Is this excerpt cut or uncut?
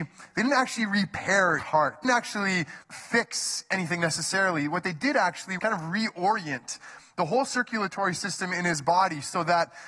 cut